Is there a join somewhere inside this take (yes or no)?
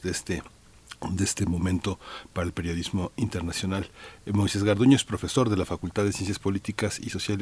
no